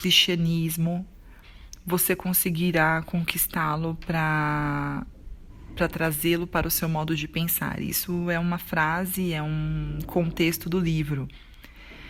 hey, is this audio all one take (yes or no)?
yes